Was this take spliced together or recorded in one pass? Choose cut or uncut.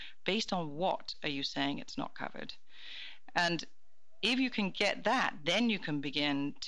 uncut